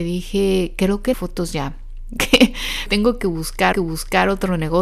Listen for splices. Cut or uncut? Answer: cut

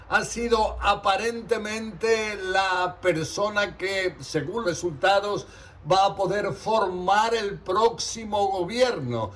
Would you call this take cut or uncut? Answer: cut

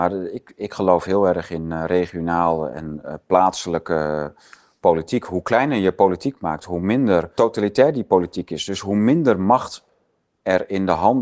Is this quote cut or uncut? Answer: uncut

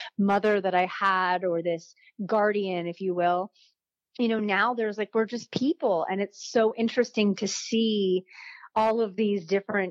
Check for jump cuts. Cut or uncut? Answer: uncut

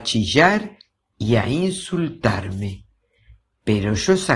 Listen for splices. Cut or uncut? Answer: uncut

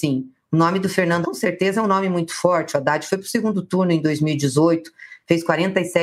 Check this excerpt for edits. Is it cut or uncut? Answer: cut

